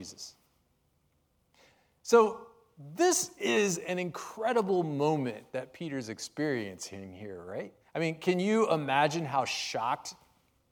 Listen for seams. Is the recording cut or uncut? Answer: cut